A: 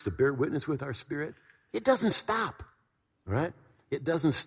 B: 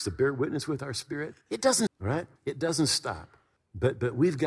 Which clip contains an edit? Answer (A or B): B